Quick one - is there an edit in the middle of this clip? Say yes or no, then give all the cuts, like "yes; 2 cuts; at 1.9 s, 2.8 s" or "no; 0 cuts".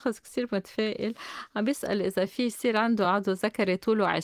no; 0 cuts